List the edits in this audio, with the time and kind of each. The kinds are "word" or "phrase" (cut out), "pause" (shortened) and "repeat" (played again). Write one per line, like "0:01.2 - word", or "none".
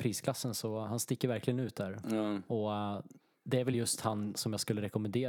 none